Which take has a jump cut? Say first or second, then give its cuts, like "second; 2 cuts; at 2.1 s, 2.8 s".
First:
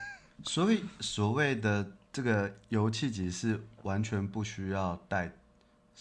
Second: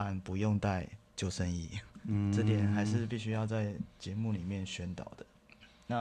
first; 1 cut; at 2.0 s